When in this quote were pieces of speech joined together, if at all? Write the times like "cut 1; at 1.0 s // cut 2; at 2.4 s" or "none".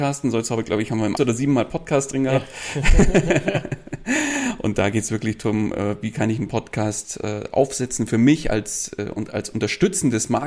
cut 1; at 1.2 s